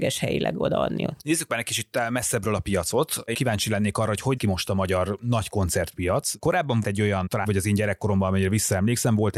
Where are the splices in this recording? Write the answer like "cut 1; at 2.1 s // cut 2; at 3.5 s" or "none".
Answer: cut 1; at 3.3 s // cut 2; at 4.4 s // cut 3; at 6.8 s // cut 4; at 7.4 s